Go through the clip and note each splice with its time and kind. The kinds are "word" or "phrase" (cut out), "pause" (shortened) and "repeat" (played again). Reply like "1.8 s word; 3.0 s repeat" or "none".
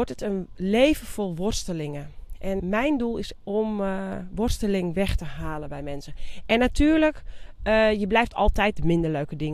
2.6 s word; 3.4 s word